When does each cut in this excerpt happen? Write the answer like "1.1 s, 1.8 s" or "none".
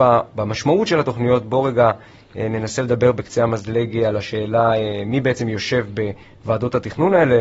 none